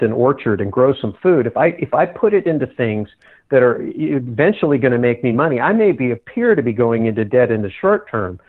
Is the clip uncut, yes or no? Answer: yes